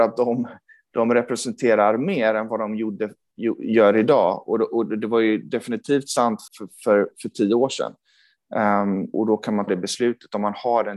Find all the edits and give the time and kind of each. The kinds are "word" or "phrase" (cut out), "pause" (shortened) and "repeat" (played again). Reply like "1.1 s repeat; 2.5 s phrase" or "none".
6.5 s word; 9.1 s word; 9.7 s word

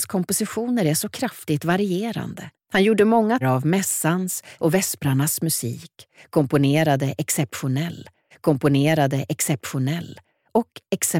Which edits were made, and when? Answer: 2.5 s pause; 3.4 s word; 4.6 s word; 8.3 s repeat

